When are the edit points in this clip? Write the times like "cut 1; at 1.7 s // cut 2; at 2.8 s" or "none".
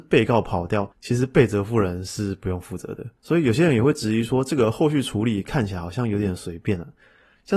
cut 1; at 0.9 s // cut 2; at 3.2 s

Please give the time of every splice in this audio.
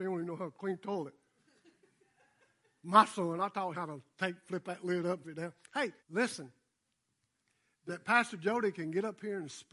cut 1; at 3.7 s // cut 2; at 5.2 s // cut 3; at 6.0 s // cut 4; at 7.9 s

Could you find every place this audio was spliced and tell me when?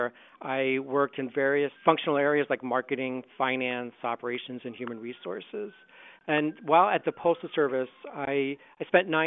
cut 1; at 1.8 s

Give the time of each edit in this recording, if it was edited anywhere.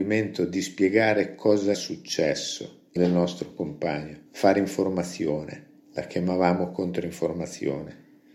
cut 1; at 1.7 s // cut 2; at 3.0 s // cut 3; at 4.3 s // cut 4; at 5.8 s

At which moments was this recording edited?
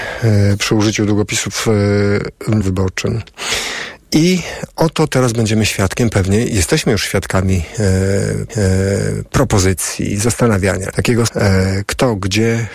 cut 1; at 2.6 s // cut 2; at 8.5 s // cut 3; at 10.9 s // cut 4; at 11.3 s

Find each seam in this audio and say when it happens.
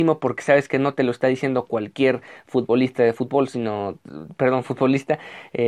none

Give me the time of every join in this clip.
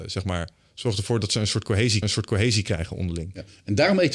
cut 1; at 2.0 s

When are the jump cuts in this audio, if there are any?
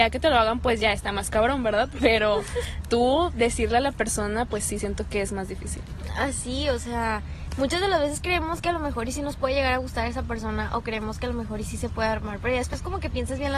none

